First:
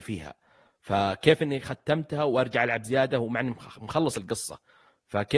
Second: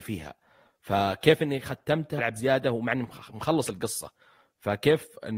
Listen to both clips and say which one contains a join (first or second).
second